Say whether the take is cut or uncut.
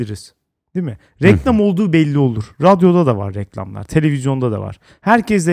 uncut